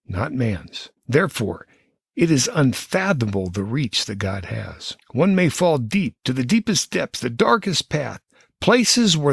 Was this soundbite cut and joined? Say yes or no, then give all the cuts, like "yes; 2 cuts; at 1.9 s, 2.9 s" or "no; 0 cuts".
yes; 2 cuts; at 1.0 s, 5.0 s